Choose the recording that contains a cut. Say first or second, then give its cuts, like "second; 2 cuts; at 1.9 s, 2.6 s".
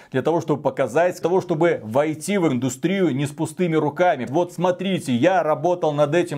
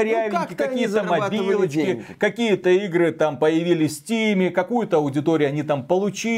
first; 3 cuts; at 1.2 s, 2.5 s, 4.3 s